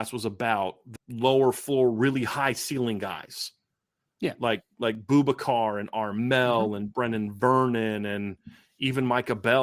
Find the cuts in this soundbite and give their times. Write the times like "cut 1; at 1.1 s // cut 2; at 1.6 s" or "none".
cut 1; at 1.0 s